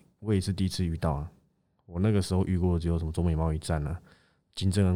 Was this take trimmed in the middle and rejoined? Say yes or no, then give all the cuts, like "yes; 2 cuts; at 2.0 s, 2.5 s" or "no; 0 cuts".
no; 0 cuts